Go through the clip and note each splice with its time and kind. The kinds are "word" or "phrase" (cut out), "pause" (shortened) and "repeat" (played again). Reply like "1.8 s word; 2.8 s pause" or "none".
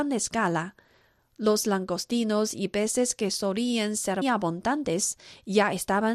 4.2 s word

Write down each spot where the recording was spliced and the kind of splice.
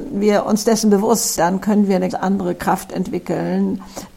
1.3 s word; 2.1 s word

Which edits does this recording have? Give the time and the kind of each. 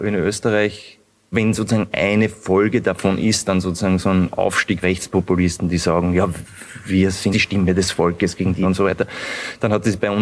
1.3 s word; 4.8 s word; 7.3 s word; 8.6 s word

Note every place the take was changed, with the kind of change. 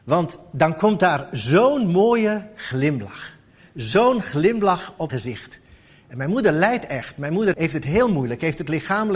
5.1 s word; 7.5 s word

